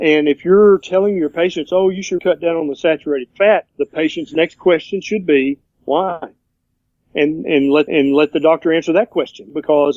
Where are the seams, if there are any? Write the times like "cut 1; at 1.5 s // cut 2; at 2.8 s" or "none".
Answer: cut 1; at 2.2 s // cut 2; at 3.7 s // cut 3; at 7.9 s